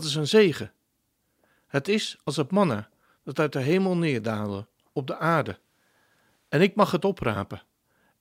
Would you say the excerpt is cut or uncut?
uncut